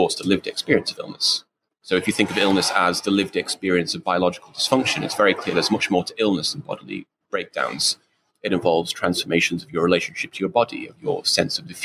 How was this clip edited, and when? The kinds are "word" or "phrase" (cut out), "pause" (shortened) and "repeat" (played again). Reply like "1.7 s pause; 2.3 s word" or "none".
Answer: none